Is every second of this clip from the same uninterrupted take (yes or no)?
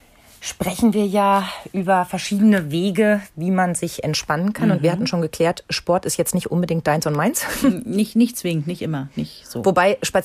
yes